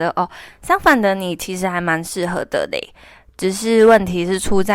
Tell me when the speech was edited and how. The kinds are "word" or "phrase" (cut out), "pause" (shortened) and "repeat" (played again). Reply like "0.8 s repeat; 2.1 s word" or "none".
none